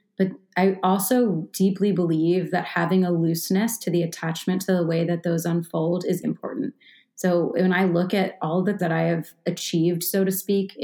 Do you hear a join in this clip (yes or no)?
yes